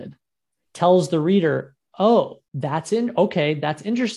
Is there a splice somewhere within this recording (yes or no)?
yes